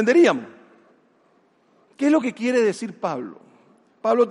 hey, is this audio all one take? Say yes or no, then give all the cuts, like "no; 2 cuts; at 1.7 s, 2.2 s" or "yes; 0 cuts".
yes; 0 cuts